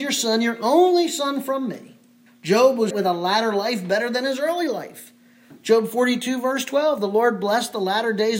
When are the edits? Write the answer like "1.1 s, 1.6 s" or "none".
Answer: 2.3 s, 2.9 s